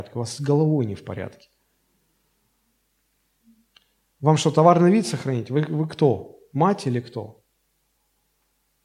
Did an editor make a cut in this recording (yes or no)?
no